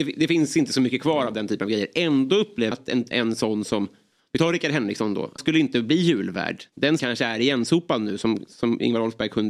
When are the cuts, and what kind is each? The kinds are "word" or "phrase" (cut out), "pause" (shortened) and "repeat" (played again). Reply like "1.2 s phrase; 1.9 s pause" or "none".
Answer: 2.7 s phrase; 5.4 s word; 7.0 s word

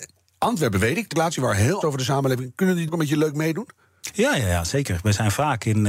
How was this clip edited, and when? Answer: 1.1 s word; 1.8 s word; 2.9 s word

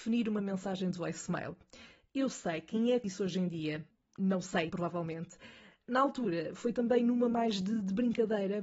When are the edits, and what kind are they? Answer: 3.0 s word; 4.7 s word

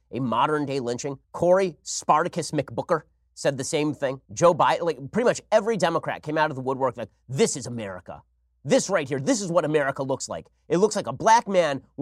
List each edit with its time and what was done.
1.2 s pause; 4.3 s pause

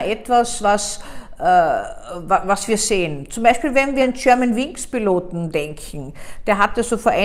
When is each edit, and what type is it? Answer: 4.0 s word

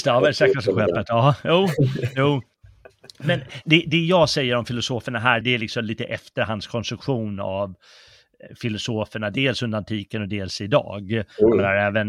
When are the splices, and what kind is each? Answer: 5.4 s word

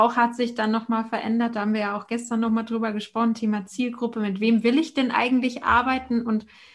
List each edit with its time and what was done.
none

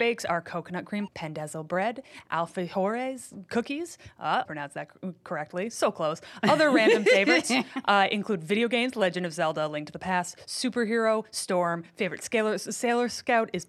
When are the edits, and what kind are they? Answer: 1.1 s word; 4.5 s word

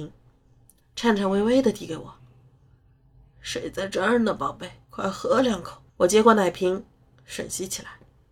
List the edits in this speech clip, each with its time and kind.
4.8 s pause; 5.9 s pause

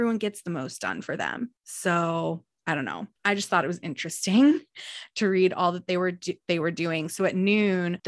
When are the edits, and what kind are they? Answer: 1.6 s pause; 3.2 s pause

